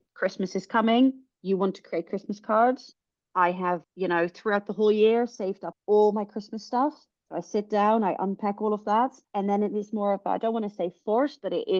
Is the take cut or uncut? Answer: uncut